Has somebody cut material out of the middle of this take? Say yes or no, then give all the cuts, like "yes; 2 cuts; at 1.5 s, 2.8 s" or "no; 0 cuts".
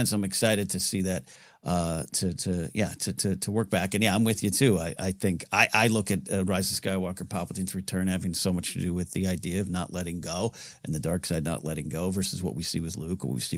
no; 0 cuts